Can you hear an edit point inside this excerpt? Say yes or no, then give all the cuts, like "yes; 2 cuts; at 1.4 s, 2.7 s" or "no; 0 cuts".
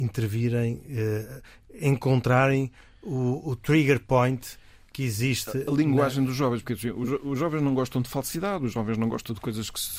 no; 0 cuts